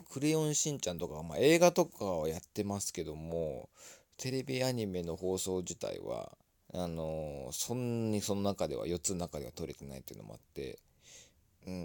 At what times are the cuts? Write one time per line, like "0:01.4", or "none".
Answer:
0:06.5